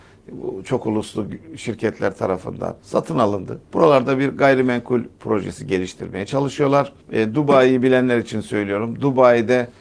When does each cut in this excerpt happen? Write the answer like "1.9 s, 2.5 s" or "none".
2.8 s, 3.6 s, 7.0 s